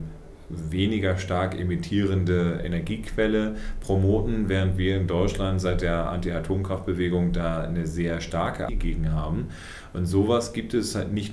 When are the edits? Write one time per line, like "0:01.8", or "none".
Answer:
0:02.6
0:08.7

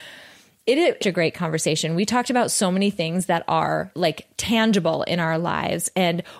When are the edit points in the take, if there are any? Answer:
0:01.0
0:03.9

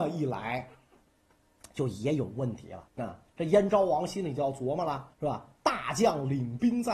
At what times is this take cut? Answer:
0:02.9
0:05.1

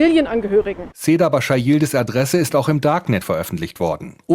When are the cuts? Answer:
none

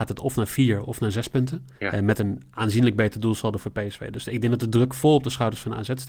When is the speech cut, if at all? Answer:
0:01.7

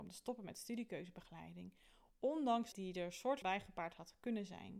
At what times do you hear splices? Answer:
0:02.7
0:03.4

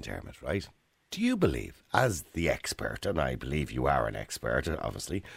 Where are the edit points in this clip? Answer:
none

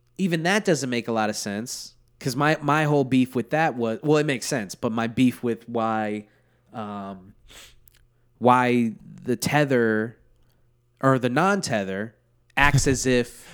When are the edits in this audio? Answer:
none

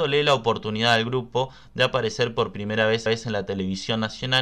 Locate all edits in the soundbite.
0:03.1

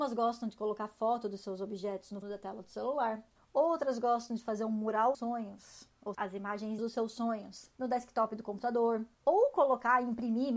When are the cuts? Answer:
0:02.2
0:03.4
0:05.1
0:06.1
0:06.8
0:07.7
0:09.1

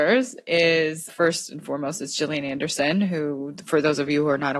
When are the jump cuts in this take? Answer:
0:01.1

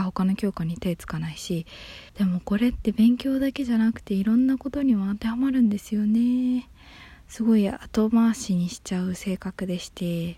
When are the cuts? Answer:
0:02.1

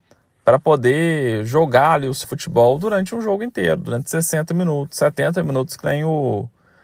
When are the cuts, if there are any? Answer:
0:02.2

